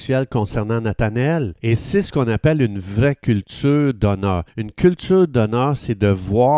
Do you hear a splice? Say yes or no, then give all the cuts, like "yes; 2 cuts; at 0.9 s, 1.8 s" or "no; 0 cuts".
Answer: yes; 2 cuts; at 1.6 s, 4.5 s